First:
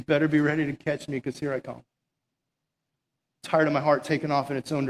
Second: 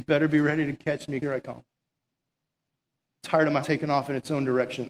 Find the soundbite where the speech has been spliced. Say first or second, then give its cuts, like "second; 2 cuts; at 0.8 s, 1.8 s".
second; 2 cuts; at 1.2 s, 3.6 s